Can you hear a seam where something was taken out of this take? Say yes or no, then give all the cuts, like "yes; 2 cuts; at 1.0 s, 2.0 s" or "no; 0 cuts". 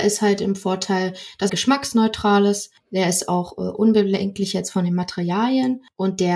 yes; 1 cut; at 1.5 s